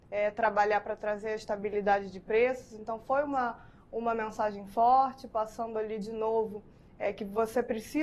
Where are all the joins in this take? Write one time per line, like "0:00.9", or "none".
none